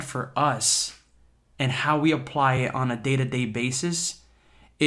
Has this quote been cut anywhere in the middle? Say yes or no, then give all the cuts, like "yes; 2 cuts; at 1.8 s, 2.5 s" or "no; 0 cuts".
no; 0 cuts